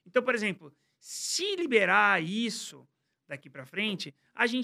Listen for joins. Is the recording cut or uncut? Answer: uncut